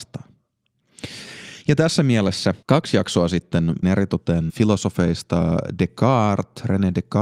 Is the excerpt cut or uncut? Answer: cut